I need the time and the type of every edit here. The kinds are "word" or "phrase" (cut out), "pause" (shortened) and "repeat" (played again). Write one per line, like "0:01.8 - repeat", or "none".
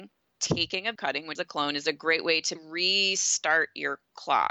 0:01.0 - word
0:01.4 - word
0:02.6 - word